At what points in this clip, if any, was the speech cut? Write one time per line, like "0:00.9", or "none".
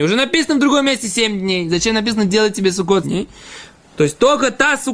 0:03.0

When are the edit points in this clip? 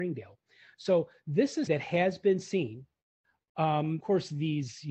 0:01.7
0:04.0

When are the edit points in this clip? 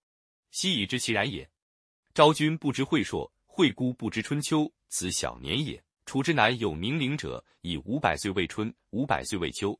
0:05.9

